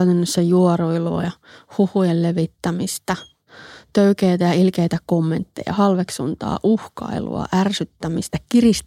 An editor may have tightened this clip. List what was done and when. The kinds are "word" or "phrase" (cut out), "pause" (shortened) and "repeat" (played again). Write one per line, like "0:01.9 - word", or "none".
none